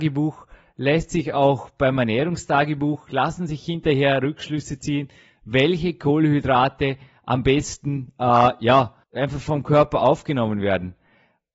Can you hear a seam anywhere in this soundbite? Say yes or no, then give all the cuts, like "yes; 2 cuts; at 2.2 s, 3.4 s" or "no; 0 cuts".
yes; 1 cut; at 9.0 s